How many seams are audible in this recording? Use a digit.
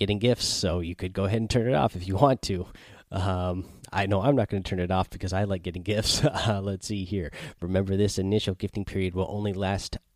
0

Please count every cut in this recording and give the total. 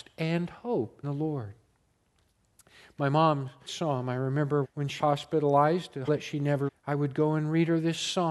6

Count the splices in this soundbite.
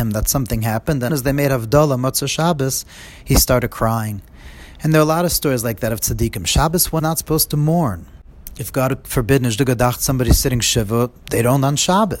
2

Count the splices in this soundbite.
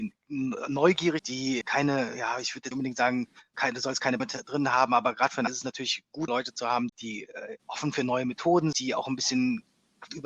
8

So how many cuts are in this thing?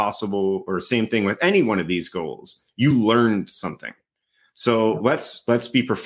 0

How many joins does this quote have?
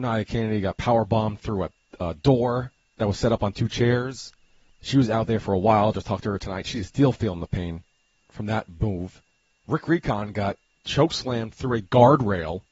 0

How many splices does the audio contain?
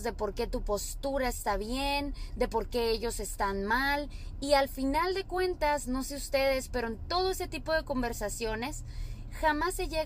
0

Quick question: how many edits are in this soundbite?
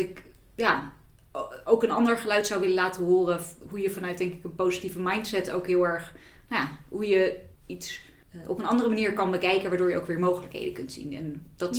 1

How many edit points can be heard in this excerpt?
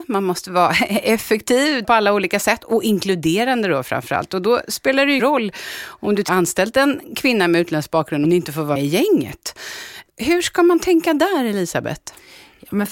5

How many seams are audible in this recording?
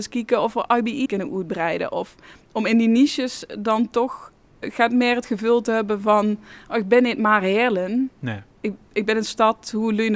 2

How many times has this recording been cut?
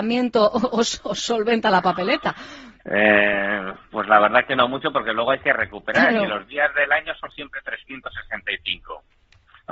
1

